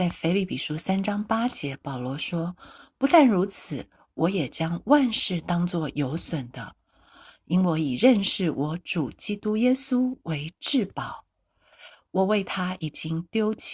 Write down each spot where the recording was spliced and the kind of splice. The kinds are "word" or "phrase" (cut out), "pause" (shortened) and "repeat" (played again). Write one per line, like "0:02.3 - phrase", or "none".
none